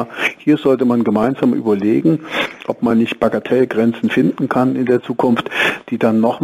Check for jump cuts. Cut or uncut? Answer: uncut